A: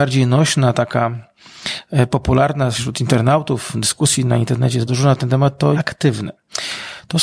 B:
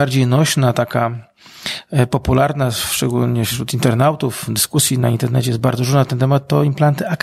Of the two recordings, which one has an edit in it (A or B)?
A